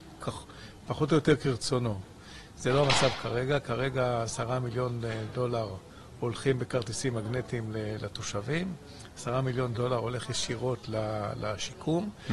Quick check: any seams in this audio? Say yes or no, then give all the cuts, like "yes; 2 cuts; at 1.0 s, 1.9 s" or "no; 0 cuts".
no; 0 cuts